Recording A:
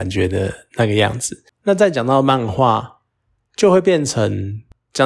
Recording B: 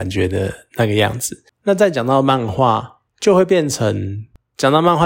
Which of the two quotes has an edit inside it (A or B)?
B